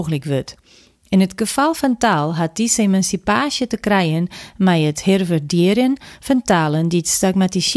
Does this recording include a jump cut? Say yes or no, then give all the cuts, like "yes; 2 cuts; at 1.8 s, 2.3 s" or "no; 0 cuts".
no; 0 cuts